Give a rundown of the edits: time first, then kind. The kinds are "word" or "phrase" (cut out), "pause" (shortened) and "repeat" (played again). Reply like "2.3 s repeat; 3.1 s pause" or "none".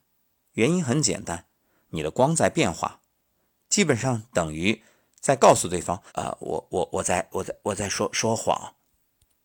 6.1 s pause